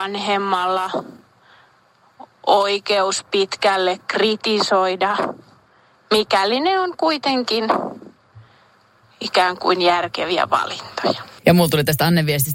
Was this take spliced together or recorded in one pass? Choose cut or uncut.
uncut